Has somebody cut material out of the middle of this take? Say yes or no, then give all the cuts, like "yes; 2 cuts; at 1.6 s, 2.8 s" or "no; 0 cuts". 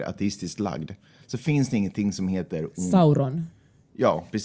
no; 0 cuts